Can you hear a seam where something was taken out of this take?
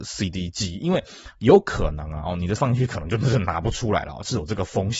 yes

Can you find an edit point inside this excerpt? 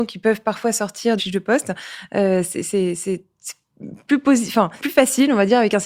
yes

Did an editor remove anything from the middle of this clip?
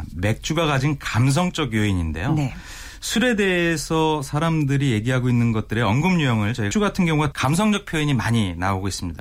yes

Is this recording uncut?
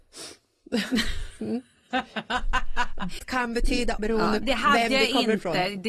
no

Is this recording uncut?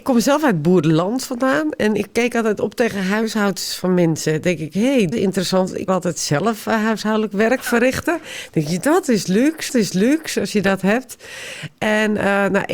no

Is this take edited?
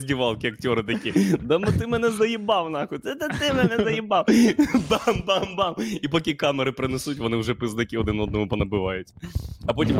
no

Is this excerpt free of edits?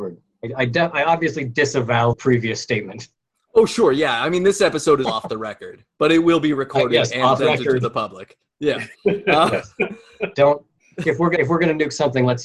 no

